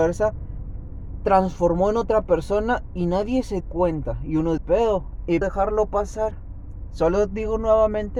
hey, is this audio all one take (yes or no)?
no